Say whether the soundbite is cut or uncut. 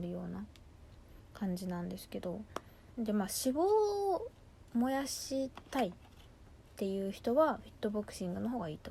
cut